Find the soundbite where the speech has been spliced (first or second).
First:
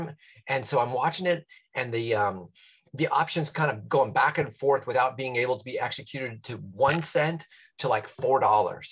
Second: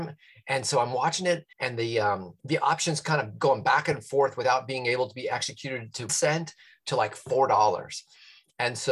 second